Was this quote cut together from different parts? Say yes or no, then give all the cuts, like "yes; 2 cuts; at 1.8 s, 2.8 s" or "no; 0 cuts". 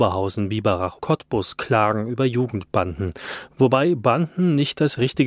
yes; 1 cut; at 1.0 s